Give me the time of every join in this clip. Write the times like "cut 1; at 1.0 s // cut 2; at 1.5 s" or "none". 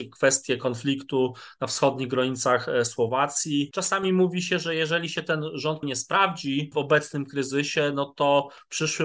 cut 1; at 5.8 s

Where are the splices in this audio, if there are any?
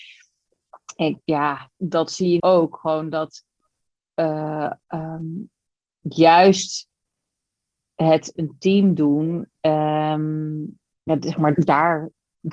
cut 1; at 1.2 s // cut 2; at 1.8 s // cut 3; at 2.4 s // cut 4; at 4.8 s // cut 5; at 8.4 s // cut 6; at 9.6 s // cut 7; at 11.0 s // cut 8; at 11.5 s

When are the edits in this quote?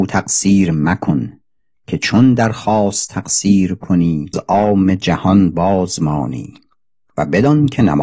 cut 1; at 4.3 s

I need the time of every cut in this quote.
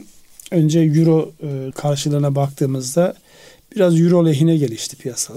cut 1; at 1.7 s

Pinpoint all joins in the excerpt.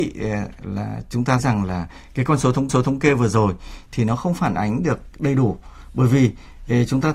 cut 1; at 1.4 s // cut 2; at 2.7 s

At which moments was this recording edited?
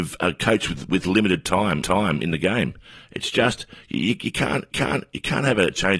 cut 1; at 1.8 s // cut 2; at 4.7 s

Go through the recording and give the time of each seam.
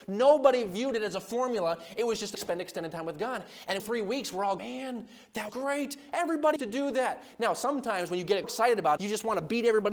cut 1; at 2.3 s // cut 2; at 3.8 s // cut 3; at 4.6 s // cut 4; at 5.5 s // cut 5; at 6.6 s // cut 6; at 8.4 s // cut 7; at 9.0 s

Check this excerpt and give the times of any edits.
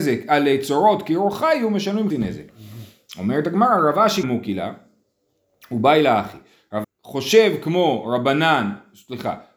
cut 1; at 2.1 s // cut 2; at 4.2 s // cut 3; at 6.8 s

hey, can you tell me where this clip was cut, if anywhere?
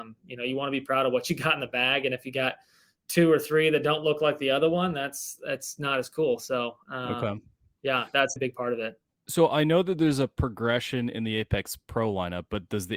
cut 1; at 8.4 s

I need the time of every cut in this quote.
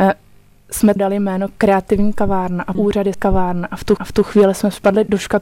cut 1; at 1.0 s // cut 2; at 1.5 s // cut 3; at 2.7 s // cut 4; at 3.1 s // cut 5; at 4.0 s

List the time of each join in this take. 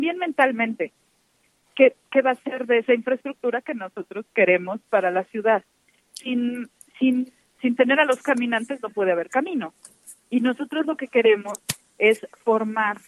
none

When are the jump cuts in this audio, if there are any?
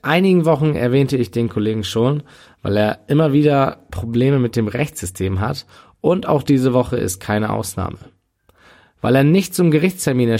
none

